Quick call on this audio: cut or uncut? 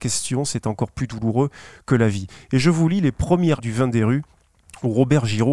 cut